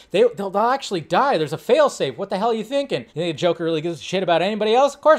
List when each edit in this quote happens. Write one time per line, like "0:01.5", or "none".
0:03.1